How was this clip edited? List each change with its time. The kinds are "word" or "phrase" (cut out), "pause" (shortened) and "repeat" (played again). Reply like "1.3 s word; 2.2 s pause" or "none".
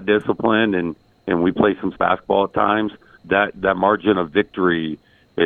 1.9 s word; 3.2 s word